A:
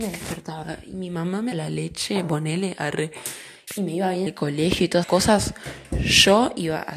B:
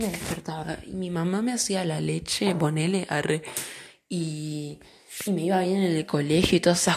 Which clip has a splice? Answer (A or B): A